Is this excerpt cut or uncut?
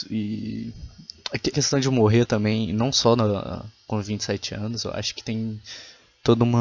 cut